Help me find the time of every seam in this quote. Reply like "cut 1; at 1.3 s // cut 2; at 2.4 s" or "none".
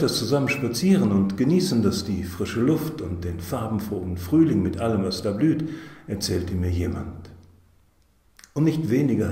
none